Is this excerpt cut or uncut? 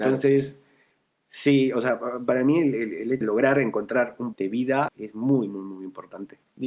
cut